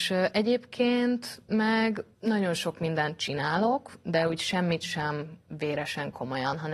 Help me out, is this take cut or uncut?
cut